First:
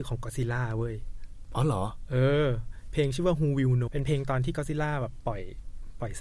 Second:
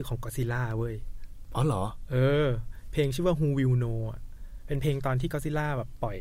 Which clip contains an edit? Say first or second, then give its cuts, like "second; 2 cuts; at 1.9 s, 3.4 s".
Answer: first; 1 cut; at 3.9 s